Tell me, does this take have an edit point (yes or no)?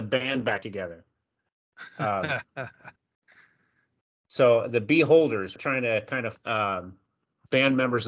yes